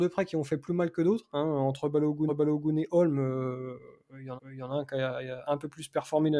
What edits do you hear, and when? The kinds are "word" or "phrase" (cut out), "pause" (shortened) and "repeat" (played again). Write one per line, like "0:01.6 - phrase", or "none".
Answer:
0:02.3 - repeat
0:04.4 - repeat